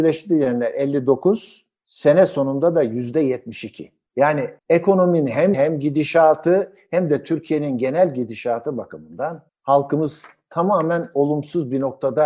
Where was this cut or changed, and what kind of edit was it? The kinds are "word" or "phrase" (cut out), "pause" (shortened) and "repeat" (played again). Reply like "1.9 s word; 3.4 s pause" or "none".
4.6 s pause; 5.5 s word; 9.5 s pause

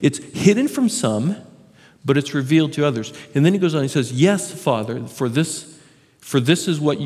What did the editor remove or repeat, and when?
none

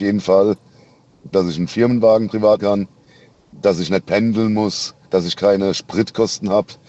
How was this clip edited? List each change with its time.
1.3 s phrase; 2.6 s word; 5.0 s pause

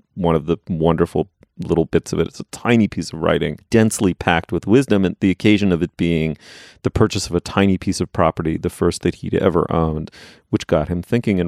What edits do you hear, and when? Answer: none

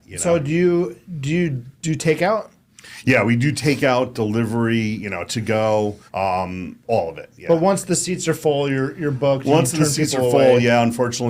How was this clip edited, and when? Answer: 1.7 s pause; 6.1 s pause

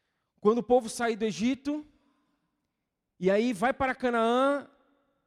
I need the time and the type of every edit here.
none

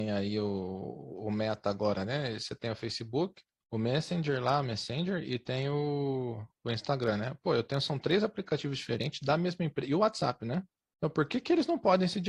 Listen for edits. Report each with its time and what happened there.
3.5 s pause; 10.8 s pause

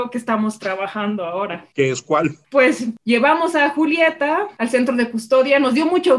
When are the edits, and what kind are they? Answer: none

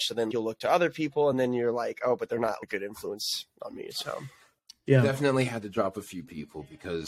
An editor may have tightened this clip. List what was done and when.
none

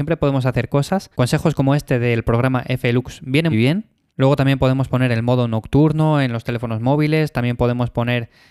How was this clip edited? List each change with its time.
1.1 s pause; 3.5 s word

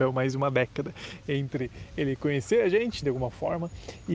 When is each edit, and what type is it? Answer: 3.0 s word

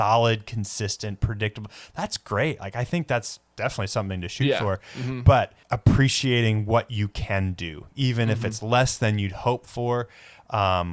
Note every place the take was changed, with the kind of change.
5.6 s pause

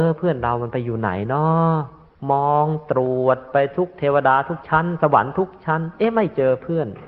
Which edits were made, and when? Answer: 2.1 s pause

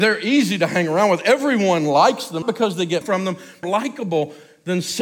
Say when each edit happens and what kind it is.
2.4 s word; 3.0 s word; 3.6 s phrase

